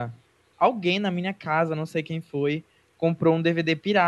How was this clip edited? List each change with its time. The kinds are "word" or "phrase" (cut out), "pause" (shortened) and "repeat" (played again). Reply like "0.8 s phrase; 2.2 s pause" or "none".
none